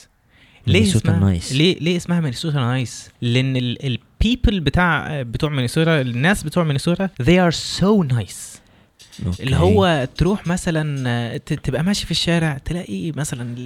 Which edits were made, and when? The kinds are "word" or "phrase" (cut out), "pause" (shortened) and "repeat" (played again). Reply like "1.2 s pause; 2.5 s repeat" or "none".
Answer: 3.1 s pause; 7.1 s pause